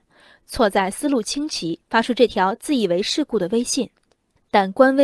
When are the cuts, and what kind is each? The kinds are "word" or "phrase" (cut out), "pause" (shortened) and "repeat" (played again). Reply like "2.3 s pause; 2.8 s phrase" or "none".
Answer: 1.8 s pause

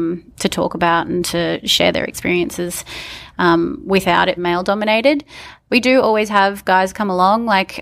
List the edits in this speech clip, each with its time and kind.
4.4 s phrase

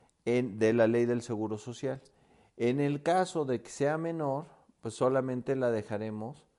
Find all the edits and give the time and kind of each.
none

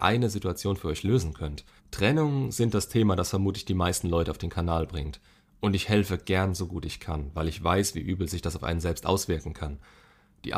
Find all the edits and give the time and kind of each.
1.8 s pause

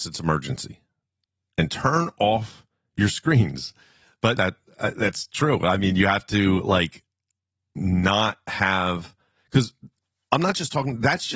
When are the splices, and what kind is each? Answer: 4.4 s word

